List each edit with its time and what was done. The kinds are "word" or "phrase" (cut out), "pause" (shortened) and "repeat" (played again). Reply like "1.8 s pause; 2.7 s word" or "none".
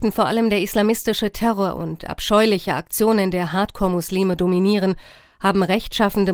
none